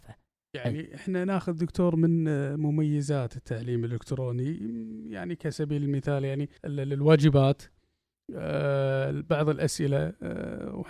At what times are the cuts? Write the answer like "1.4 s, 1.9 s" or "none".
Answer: 6.6 s